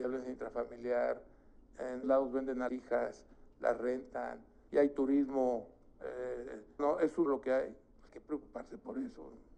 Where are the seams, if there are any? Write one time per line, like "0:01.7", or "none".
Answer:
0:02.0
0:02.7
0:04.7
0:06.8
0:07.3
0:08.1